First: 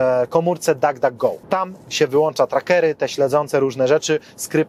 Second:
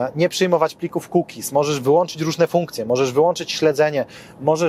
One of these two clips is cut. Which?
first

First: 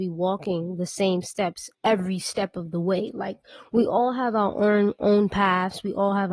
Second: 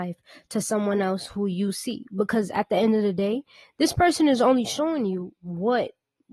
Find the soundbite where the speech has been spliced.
first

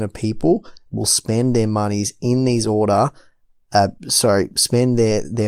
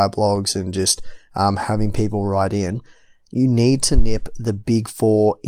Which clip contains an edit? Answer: first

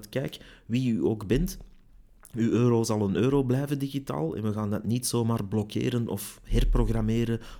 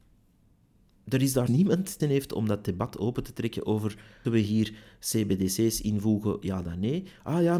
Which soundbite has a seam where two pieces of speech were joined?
second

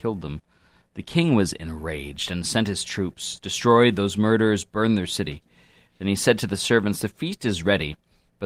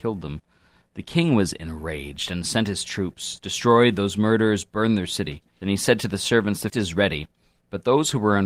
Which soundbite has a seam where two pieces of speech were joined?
second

